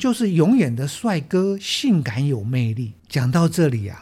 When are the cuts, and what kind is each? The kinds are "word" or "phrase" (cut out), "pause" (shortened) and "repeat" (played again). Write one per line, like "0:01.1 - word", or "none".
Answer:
0:03.0 - pause